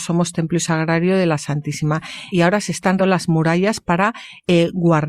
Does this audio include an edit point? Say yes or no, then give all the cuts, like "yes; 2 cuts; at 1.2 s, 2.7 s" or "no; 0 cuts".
yes; 2 cuts; at 2.3 s, 3.0 s